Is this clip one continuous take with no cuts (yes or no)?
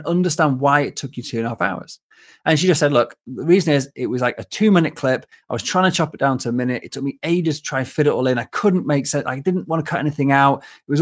yes